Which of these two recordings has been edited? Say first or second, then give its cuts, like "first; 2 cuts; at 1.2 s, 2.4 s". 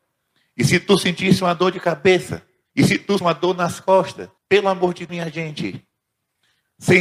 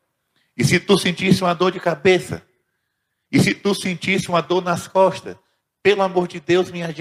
first; 4 cuts; at 2.7 s, 3.2 s, 4.4 s, 5.1 s